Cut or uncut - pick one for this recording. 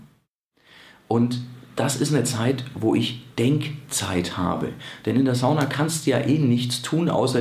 uncut